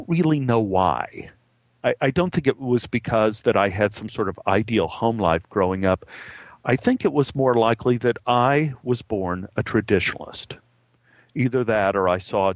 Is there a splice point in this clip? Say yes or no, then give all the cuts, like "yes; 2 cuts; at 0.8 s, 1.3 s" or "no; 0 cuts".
no; 0 cuts